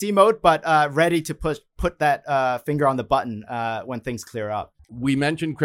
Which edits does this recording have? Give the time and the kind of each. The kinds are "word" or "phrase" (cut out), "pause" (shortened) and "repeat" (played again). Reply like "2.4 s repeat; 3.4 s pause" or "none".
none